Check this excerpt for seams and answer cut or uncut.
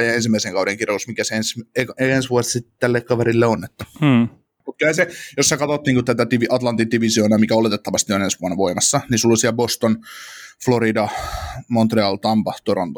uncut